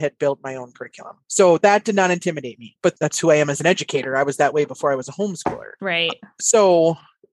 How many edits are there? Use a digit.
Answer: 0